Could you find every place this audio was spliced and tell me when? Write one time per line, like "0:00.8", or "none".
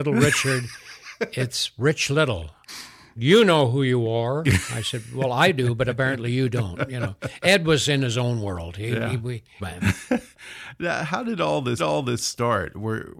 0:03.2
0:09.6
0:11.8